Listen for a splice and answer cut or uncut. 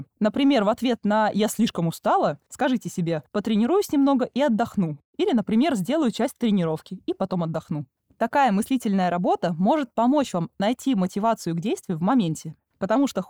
uncut